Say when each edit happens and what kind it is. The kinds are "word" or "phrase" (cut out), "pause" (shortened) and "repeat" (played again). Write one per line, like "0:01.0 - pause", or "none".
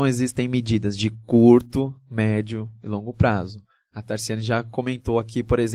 none